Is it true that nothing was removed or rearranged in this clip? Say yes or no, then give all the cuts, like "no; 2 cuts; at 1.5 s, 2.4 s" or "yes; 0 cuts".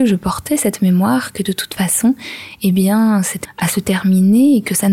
no; 1 cut; at 3.4 s